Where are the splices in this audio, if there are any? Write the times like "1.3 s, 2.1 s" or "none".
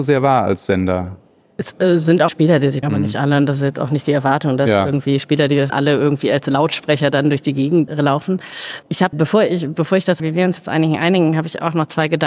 2.3 s, 2.8 s, 5.7 s, 7.9 s, 9.1 s, 10.2 s